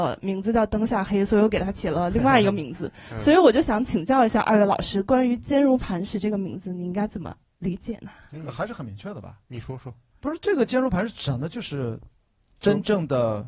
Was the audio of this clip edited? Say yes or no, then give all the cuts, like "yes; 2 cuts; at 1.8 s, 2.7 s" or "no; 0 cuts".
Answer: no; 0 cuts